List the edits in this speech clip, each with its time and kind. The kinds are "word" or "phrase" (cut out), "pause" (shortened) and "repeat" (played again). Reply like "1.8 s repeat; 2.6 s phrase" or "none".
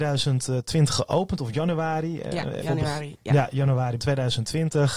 2.6 s word; 4.0 s word

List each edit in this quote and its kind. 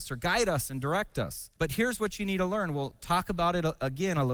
1.6 s pause

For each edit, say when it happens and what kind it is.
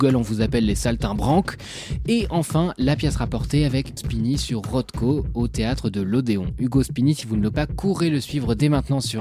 4.0 s word; 7.5 s word

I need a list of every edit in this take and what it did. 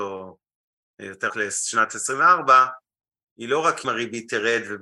1.3 s word; 3.8 s word

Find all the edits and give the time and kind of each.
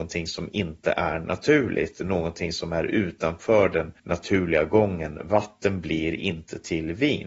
4.0 s pause

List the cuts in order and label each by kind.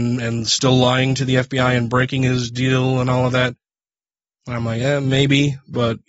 none

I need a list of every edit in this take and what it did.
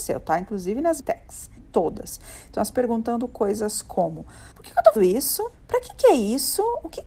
1.0 s word; 1.6 s word; 2.7 s phrase; 4.5 s pause; 5.0 s word; 5.5 s pause

